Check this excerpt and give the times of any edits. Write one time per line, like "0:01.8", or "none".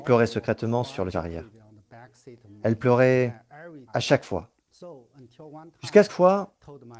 0:01.1
0:03.9
0:06.1